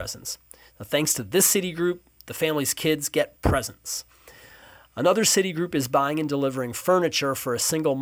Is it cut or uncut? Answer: uncut